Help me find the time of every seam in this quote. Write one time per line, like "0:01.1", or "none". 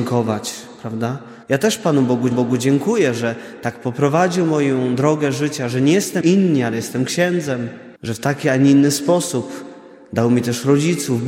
0:01.4
0:02.3
0:06.2
0:08.0